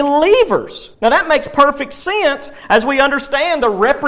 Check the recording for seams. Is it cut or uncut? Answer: cut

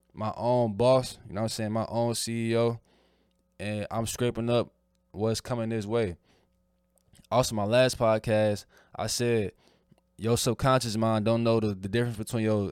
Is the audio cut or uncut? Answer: uncut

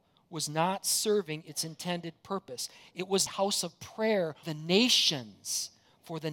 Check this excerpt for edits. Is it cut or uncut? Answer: cut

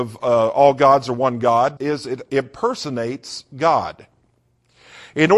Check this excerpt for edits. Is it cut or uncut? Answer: cut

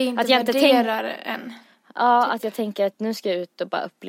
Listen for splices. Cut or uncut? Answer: uncut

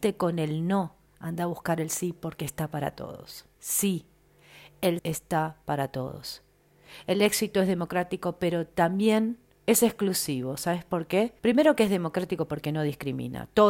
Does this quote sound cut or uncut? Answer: cut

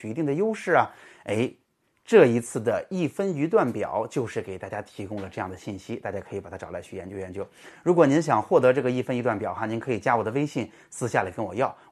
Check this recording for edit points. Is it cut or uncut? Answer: uncut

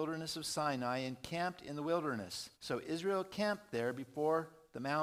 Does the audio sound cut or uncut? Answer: cut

